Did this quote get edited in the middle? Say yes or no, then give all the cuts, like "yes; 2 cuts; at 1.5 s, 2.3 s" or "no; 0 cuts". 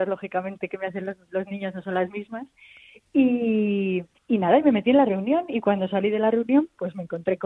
yes; 1 cut; at 4.1 s